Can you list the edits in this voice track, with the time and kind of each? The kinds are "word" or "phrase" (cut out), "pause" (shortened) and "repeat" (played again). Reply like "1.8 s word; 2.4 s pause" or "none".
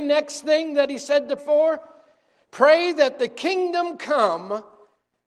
1.4 s word